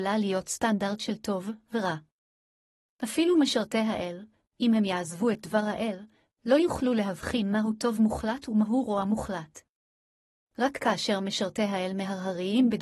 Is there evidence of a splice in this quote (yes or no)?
no